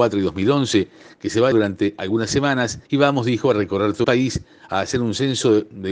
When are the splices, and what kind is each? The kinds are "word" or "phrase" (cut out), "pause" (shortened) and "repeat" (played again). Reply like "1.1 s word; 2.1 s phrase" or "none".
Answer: 1.5 s word; 2.8 s pause; 4.0 s word

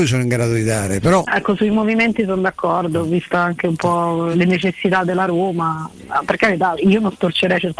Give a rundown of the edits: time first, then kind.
4.3 s word; 6.8 s word

